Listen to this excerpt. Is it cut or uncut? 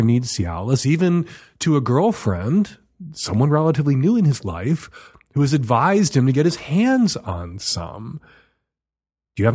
uncut